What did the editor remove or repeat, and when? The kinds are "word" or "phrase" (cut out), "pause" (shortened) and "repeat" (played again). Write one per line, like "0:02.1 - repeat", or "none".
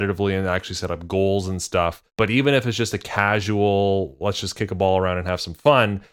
0:02.1 - pause